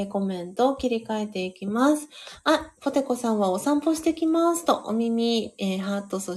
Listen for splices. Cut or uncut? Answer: cut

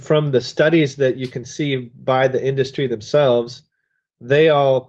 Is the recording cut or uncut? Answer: uncut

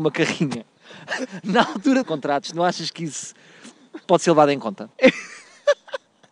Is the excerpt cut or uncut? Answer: cut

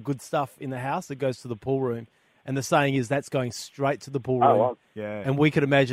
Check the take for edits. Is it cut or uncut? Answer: uncut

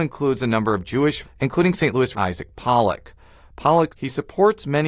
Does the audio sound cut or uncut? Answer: cut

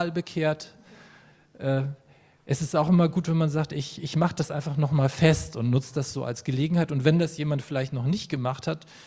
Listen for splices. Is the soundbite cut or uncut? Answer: uncut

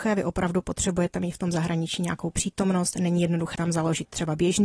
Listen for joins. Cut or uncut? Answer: cut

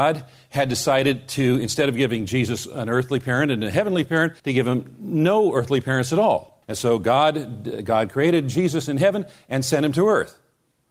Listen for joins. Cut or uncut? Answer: cut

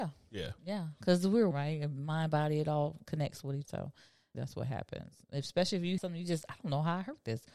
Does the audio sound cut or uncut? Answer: cut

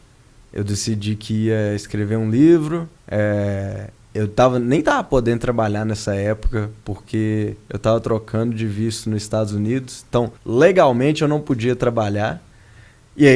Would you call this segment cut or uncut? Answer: cut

